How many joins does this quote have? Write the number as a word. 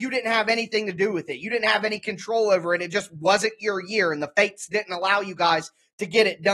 zero